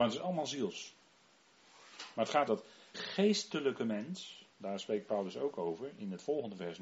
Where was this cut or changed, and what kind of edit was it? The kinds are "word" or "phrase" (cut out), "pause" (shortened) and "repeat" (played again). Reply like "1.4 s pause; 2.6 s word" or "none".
2.5 s word; 2.9 s word; 4.5 s pause